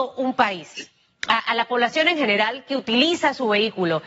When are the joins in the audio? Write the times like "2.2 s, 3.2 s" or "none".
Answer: none